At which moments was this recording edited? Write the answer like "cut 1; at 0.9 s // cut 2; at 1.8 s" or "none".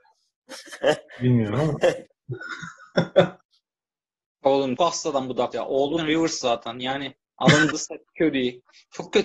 cut 1; at 2.1 s // cut 2; at 3.4 s // cut 3; at 4.8 s // cut 4; at 5.5 s // cut 5; at 6.0 s // cut 6; at 7.2 s // cut 7; at 7.7 s